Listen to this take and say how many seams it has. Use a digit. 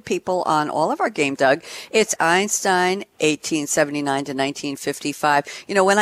2